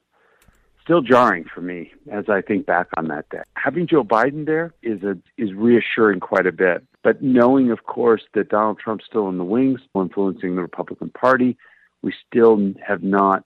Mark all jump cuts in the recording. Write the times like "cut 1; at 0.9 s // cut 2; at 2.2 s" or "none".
cut 1; at 4.8 s // cut 2; at 5.3 s // cut 3; at 6.9 s // cut 4; at 9.9 s

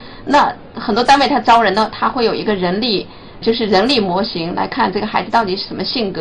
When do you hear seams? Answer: cut 1; at 3.4 s

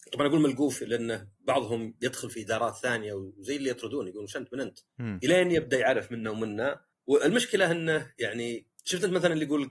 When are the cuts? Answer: cut 1; at 4.9 s // cut 2; at 6.9 s // cut 3; at 8.8 s

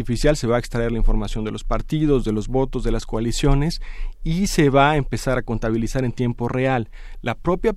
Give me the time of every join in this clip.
none

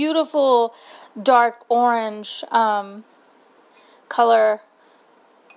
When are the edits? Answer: none

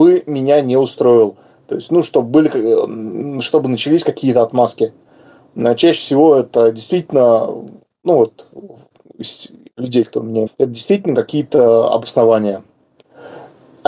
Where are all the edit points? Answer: cut 1; at 10.5 s

